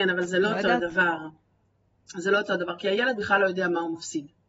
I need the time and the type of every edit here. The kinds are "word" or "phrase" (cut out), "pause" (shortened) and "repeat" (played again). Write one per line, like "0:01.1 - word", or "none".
none